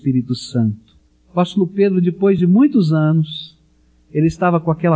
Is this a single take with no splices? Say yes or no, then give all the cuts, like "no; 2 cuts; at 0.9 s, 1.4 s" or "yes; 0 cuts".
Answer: yes; 0 cuts